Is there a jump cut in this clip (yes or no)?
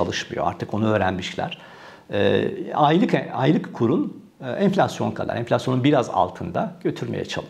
yes